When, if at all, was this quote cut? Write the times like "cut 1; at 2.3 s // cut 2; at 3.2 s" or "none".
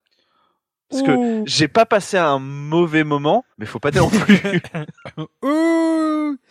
cut 1; at 1.4 s // cut 2; at 3.5 s // cut 3; at 3.9 s